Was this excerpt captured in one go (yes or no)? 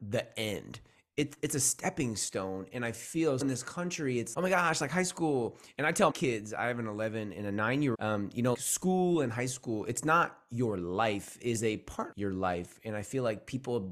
no